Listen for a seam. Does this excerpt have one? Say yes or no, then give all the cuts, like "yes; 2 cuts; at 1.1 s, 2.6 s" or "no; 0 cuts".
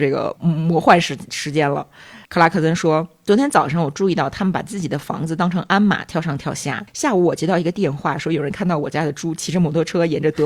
yes; 2 cuts; at 2.2 s, 6.9 s